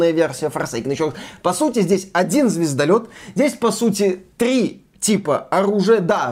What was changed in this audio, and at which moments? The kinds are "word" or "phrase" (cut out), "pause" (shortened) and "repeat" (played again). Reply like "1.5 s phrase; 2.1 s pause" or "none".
none